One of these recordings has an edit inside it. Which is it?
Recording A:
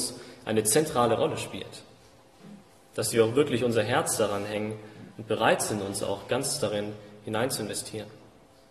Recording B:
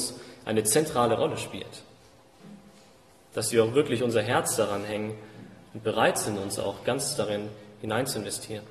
A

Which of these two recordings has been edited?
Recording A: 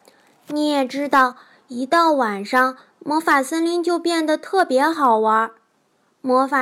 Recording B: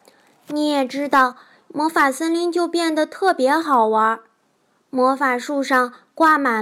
B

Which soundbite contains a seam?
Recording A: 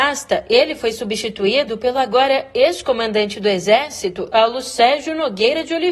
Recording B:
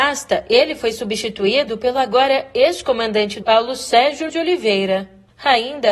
B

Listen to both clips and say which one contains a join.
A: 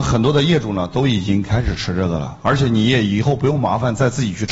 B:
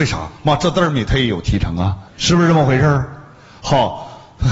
B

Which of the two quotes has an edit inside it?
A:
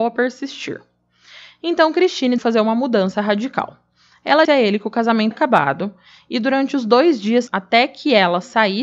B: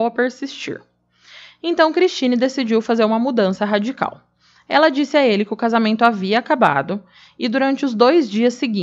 A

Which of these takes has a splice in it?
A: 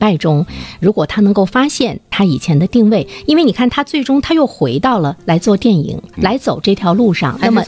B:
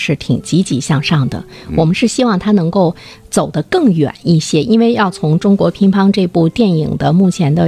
A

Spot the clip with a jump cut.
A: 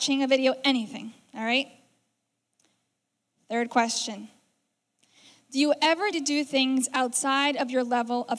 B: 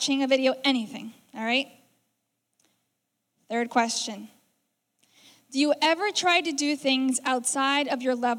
A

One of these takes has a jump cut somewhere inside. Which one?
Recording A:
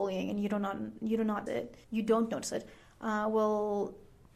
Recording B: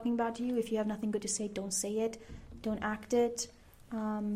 A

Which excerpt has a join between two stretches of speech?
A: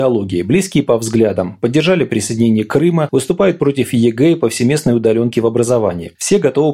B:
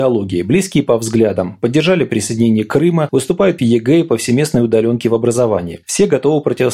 B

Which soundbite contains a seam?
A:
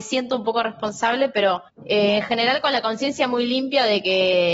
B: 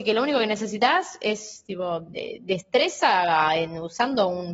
A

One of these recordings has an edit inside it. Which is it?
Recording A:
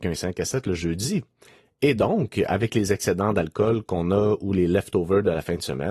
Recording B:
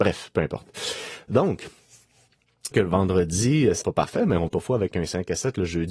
B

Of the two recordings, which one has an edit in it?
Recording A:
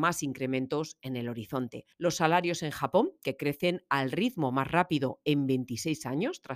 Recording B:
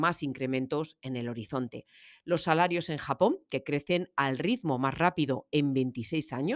A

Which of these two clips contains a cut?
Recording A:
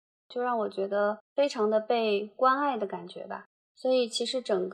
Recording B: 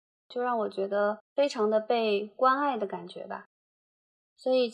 A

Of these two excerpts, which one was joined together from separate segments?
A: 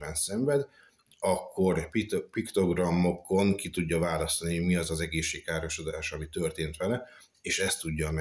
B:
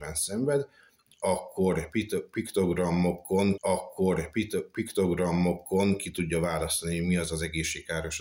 B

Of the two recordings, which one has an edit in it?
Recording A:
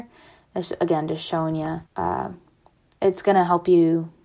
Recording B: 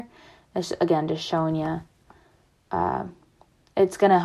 A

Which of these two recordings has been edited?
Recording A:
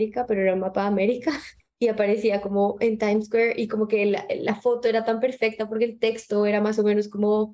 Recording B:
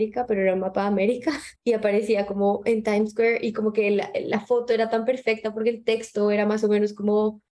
B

